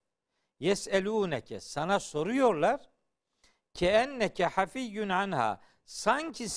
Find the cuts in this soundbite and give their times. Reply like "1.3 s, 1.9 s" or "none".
none